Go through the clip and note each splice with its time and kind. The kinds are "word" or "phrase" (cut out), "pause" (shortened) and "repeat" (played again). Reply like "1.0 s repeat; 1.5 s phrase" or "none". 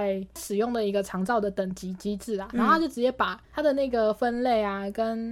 3.4 s pause